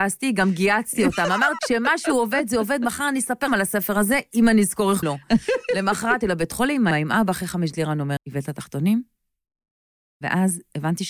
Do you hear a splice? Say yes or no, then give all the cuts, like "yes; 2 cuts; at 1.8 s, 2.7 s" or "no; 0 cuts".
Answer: yes; 7 cuts; at 1.6 s, 3.5 s, 5.0 s, 6.2 s, 6.9 s, 7.7 s, 8.2 s